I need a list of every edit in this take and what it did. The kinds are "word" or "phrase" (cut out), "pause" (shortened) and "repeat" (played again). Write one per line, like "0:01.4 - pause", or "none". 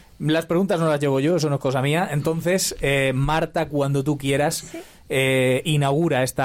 none

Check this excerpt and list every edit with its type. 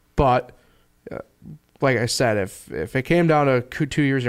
none

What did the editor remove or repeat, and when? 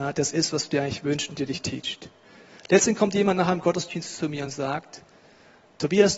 none

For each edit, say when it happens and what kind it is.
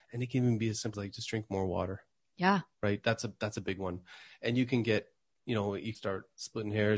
0:00.9 - word
0:05.9 - word

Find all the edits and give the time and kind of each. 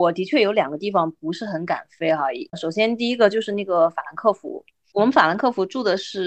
0:04.9 - word

